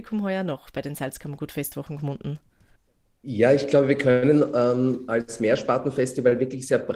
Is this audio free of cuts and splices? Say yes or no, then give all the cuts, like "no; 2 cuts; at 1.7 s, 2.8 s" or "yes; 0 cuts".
yes; 0 cuts